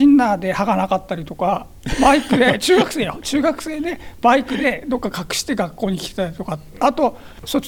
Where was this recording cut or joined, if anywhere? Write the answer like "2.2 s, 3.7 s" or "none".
none